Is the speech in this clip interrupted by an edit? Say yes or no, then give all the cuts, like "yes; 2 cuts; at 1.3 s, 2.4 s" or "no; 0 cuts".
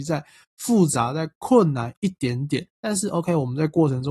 yes; 1 cut; at 2.7 s